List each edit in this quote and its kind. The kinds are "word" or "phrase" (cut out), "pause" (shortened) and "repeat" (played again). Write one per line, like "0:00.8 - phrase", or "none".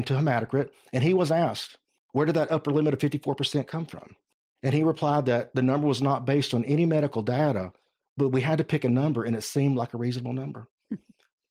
none